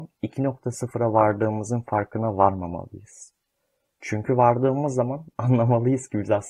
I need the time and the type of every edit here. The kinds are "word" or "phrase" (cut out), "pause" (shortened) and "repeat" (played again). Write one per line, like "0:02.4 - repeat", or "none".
none